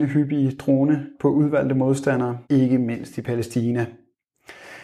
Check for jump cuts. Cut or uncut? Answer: cut